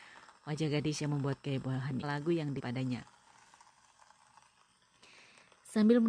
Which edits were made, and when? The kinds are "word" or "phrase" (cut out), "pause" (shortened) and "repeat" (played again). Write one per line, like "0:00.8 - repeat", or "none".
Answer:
0:01.0 - phrase
0:02.0 - phrase
0:02.6 - word